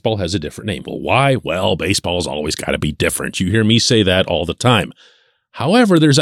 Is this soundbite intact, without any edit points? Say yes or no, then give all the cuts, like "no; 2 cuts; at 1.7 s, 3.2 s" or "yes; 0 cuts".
yes; 0 cuts